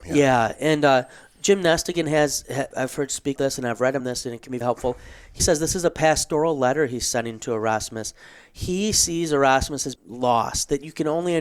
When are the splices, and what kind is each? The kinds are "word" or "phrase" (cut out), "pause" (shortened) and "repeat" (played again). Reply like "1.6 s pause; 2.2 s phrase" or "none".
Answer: 2.7 s word; 3.4 s word; 4.0 s word; 4.6 s word; 5.4 s word; 9.9 s word